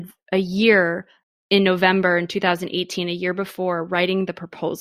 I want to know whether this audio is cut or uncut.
cut